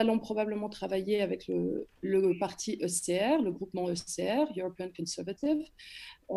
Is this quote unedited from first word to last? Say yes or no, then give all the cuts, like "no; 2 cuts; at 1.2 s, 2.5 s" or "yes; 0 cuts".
no; 1 cut; at 1.9 s